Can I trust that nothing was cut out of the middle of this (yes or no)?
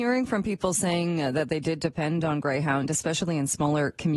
yes